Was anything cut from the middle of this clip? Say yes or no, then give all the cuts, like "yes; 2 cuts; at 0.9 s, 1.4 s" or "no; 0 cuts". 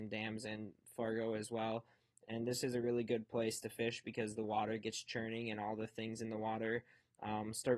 no; 0 cuts